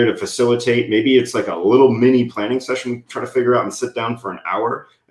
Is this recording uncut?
yes; 0 cuts

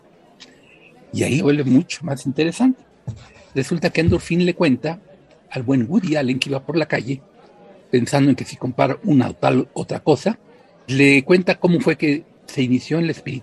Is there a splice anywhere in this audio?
yes; 2 cuts; at 1.4 s, 10.9 s

